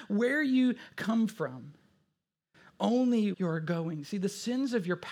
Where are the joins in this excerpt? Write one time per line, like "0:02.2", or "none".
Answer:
0:03.3